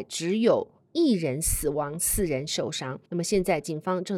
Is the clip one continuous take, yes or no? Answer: no